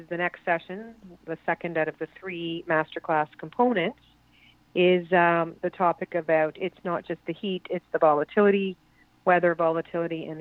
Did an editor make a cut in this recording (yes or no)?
no